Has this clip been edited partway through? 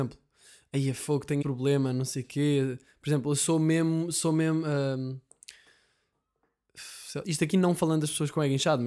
yes; 2 cuts; at 1.4 s, 7.2 s

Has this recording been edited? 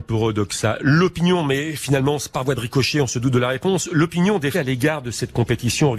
yes; 1 cut; at 4.5 s

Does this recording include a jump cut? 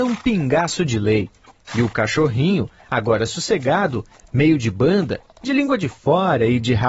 no; 0 cuts

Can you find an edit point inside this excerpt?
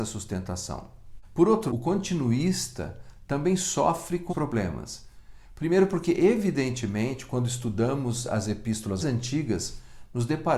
yes; 3 cuts; at 1.7 s, 4.3 s, 9.0 s

